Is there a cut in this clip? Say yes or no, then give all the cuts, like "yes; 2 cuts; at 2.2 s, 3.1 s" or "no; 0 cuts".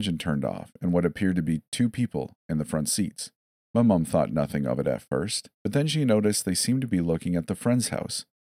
yes; 2 cuts; at 3.6 s, 5.5 s